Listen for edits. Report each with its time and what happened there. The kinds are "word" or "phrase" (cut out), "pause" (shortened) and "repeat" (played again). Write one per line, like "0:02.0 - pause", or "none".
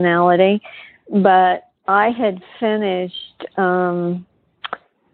0:01.8 - pause

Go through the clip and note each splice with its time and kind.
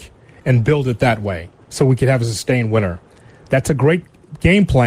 none

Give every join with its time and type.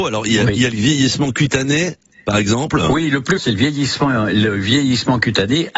0:02.1 - pause
0:03.4 - word

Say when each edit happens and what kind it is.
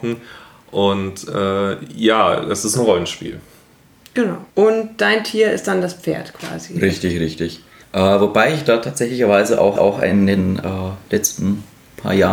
0:04.5 - pause
0:07.8 - pause
0:09.8 - repeat

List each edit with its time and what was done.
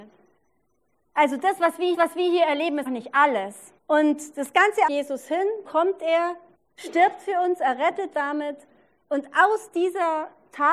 0:01.9 - repeat
0:02.9 - word
0:03.8 - pause
0:04.9 - phrase
0:05.6 - word
0:06.5 - pause
0:08.1 - word

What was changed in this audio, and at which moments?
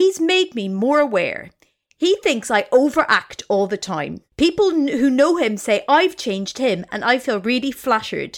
0:04.3 - pause

